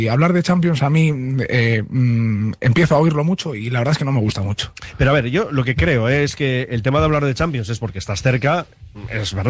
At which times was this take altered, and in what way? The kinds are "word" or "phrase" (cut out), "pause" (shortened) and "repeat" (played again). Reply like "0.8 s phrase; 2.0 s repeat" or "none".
none